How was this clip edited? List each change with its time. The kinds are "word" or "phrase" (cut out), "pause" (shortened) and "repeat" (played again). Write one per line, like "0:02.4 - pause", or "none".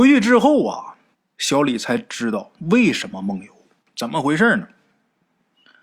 0:01.1 - pause
0:03.8 - pause